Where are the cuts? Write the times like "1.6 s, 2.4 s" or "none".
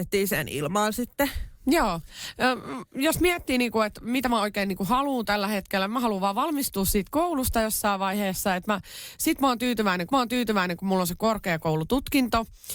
10.1 s